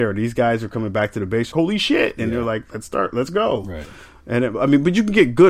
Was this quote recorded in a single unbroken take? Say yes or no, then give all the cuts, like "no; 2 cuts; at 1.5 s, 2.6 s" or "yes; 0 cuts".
no; 1 cut; at 1.5 s